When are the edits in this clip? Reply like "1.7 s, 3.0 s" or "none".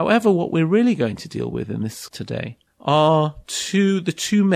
2.1 s